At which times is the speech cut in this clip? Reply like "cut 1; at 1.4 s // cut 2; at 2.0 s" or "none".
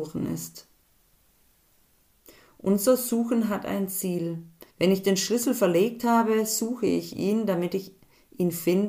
cut 1; at 4.7 s